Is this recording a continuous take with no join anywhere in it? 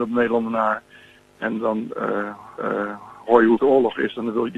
no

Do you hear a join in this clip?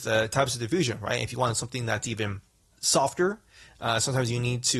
yes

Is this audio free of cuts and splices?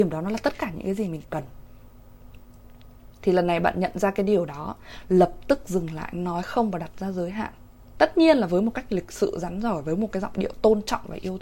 yes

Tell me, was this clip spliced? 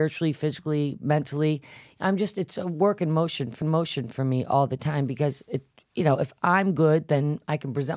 yes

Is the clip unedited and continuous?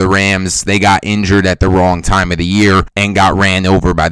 yes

